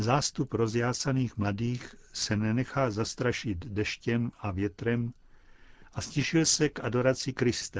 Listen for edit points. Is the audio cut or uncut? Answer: uncut